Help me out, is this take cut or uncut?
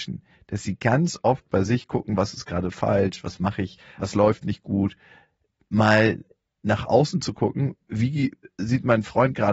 uncut